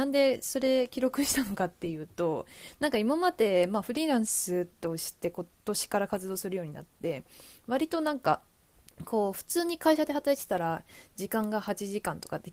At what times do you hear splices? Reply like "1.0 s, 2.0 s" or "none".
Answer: none